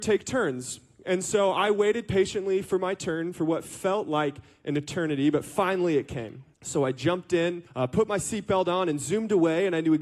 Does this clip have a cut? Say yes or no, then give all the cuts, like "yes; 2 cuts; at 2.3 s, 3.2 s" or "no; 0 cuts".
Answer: yes; 2 cuts; at 6.5 s, 7.7 s